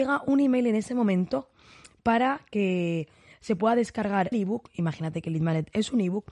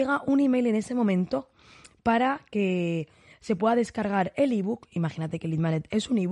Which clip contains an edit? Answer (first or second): first